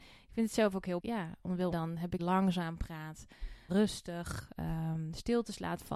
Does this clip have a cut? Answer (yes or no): yes